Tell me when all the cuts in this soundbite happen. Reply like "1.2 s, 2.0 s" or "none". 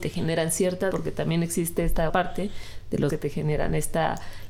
0.9 s, 2.1 s, 3.1 s